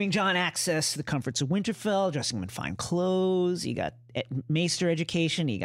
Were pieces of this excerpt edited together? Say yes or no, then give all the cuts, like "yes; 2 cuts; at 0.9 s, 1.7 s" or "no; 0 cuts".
no; 0 cuts